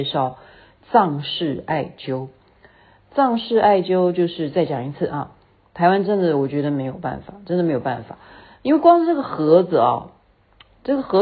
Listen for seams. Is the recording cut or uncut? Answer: uncut